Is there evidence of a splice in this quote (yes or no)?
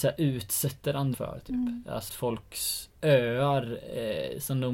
yes